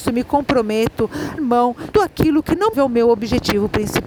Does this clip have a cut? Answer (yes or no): yes